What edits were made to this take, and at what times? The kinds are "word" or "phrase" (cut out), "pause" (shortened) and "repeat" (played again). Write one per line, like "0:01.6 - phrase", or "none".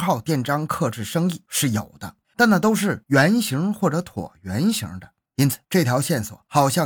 0:02.2 - pause
0:05.3 - pause